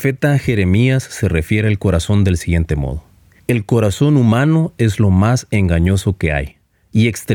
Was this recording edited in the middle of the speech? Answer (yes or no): no